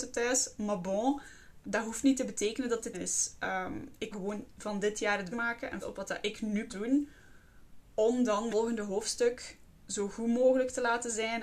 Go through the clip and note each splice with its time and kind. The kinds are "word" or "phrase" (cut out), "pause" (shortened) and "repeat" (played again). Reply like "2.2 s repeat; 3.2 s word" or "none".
1.6 s word; 2.9 s phrase; 4.1 s word; 5.3 s word; 5.8 s word; 6.7 s word; 8.5 s word